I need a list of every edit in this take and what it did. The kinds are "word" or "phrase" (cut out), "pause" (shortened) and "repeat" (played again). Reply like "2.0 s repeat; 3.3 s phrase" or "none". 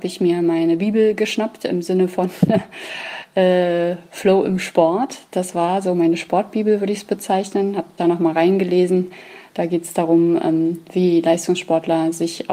8.0 s word